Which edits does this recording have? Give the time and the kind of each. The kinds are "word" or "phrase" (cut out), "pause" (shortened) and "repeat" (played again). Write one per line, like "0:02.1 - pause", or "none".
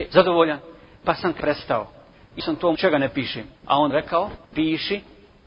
0:01.4 - word
0:02.4 - word
0:02.7 - phrase
0:03.6 - pause
0:03.9 - phrase
0:04.4 - pause